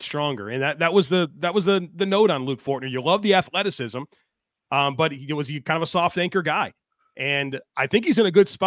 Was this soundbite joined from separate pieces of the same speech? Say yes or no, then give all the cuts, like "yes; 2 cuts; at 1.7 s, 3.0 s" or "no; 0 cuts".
no; 0 cuts